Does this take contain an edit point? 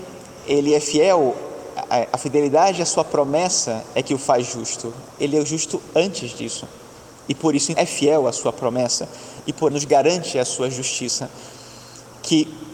yes; 2 cuts; at 7.7 s, 9.7 s

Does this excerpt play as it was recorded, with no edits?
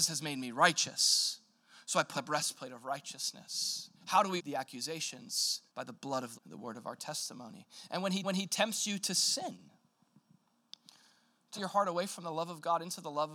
no; 7 cuts; at 2.1 s, 3.9 s, 4.4 s, 5.7 s, 6.3 s, 8.2 s, 11.6 s

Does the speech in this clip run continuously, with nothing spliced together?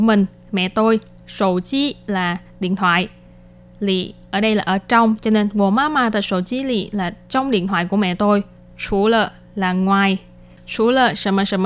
no; 1 cut; at 1.2 s

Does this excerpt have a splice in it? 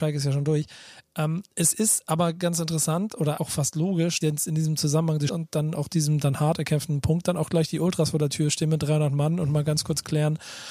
yes; 3 cuts; at 3.4 s, 4.2 s, 5.3 s

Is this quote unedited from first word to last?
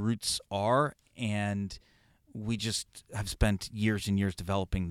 yes; 0 cuts

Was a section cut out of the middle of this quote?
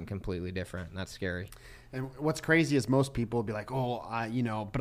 no; 0 cuts

